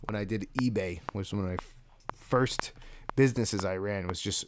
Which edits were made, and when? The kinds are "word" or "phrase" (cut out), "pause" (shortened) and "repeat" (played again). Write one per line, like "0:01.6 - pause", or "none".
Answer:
none